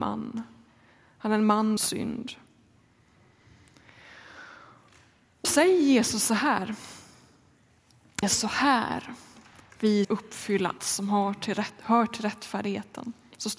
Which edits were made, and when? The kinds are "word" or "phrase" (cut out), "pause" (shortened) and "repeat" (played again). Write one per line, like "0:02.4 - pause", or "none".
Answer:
0:01.8 - word
0:05.4 - word
0:08.2 - word
0:10.0 - word
0:10.8 - word